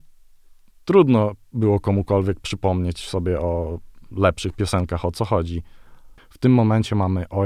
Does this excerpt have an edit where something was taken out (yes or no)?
no